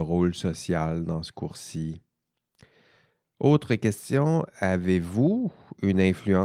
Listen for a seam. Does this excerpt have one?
no; 0 cuts

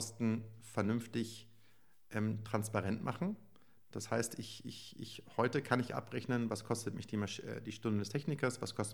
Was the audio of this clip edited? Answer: no; 0 cuts

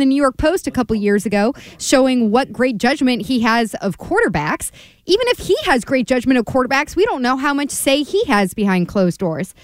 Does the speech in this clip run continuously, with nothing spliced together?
yes; 0 cuts

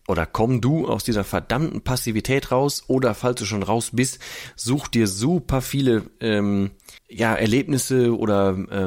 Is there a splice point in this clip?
yes; 1 cut; at 7.0 s

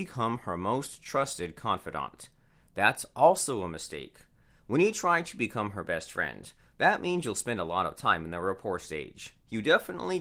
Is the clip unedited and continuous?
yes; 0 cuts

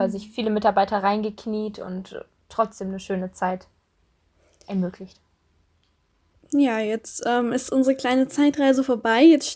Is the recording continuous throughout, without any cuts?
yes; 0 cuts

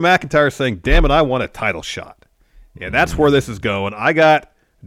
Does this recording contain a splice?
no; 0 cuts

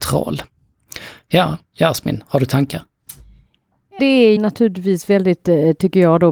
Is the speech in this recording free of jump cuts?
no; 2 cuts; at 4.0 s, 4.4 s

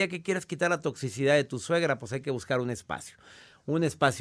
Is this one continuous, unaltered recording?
yes; 0 cuts

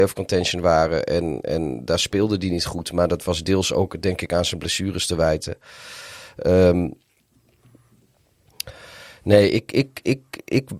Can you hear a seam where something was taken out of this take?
no; 0 cuts

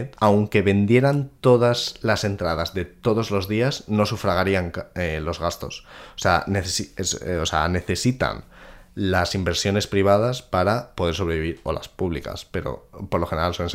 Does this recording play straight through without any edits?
yes; 0 cuts

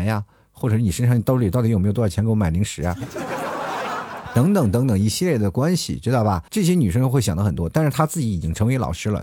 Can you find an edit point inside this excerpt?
yes; 1 cut; at 6.5 s

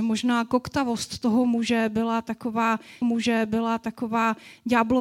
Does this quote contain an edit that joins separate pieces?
yes; 1 cut; at 3.0 s

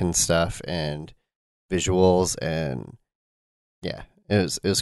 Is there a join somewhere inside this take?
no; 0 cuts

